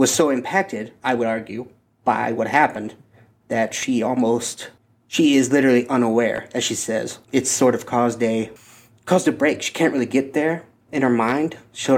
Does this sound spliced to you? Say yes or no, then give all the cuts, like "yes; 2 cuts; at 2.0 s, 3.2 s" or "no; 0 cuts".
no; 0 cuts